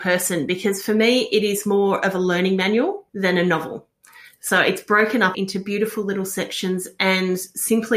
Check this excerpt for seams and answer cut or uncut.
cut